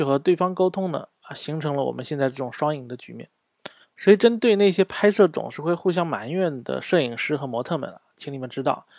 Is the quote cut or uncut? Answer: cut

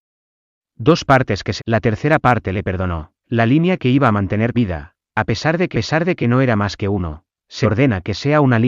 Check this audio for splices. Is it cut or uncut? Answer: cut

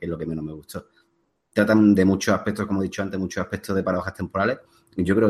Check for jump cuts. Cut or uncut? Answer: uncut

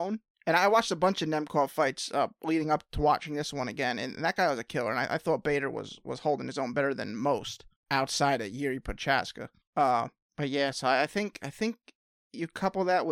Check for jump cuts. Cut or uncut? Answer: uncut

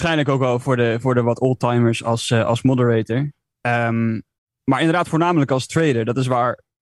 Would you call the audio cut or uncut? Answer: cut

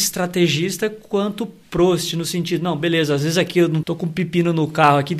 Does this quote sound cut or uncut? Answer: cut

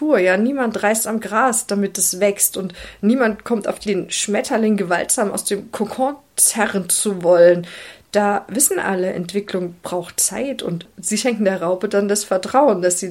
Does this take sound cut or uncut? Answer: cut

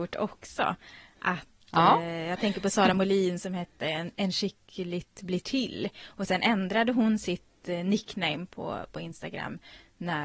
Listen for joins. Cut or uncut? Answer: uncut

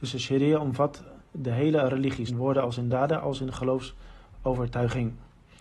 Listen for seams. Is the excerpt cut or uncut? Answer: cut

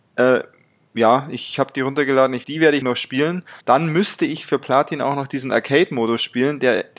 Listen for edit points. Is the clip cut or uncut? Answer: cut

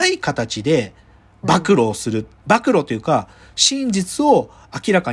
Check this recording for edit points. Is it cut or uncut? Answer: uncut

